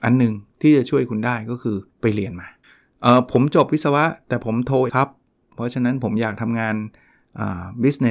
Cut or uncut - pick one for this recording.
cut